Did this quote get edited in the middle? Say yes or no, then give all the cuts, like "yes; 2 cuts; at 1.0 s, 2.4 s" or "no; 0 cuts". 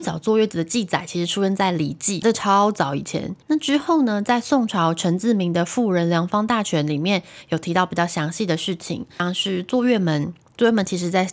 yes; 2 cuts; at 2.2 s, 3.4 s